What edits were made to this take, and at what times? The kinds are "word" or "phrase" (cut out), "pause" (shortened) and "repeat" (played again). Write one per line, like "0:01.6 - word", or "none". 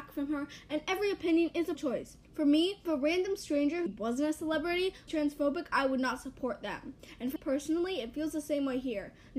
0:01.7 - word
0:02.2 - pause
0:02.9 - word
0:03.9 - word
0:05.1 - word
0:07.4 - word